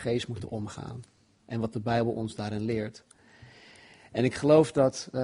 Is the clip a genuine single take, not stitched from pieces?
yes; 0 cuts

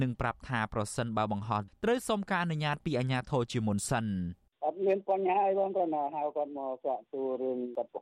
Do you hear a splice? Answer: yes; 2 cuts; at 1.7 s, 4.4 s

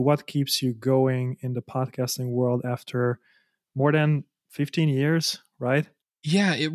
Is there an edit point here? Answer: no; 0 cuts

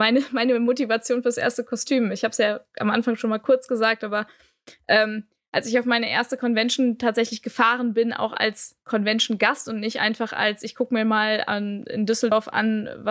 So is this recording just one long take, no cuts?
yes; 0 cuts

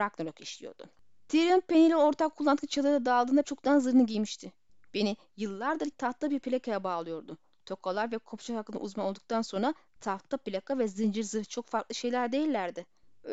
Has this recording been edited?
yes; 2 cuts; at 3.4 s, 5.9 s

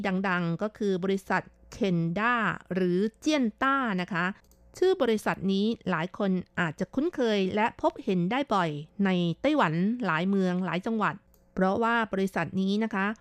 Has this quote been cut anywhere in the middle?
no; 0 cuts

